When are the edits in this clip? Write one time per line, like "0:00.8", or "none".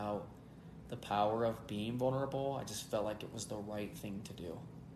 none

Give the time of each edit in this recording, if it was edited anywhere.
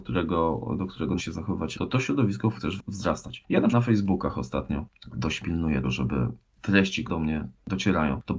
0:01.2
0:01.7
0:02.6
0:03.7
0:05.4
0:05.8
0:07.1

